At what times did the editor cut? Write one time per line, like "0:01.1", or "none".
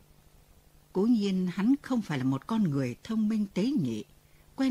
none